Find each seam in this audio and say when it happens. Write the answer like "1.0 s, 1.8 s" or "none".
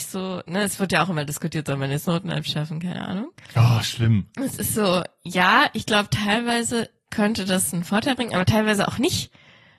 none